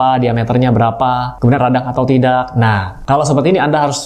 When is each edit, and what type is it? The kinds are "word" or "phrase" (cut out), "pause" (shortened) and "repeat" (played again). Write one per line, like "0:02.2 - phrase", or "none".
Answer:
0:01.6 - phrase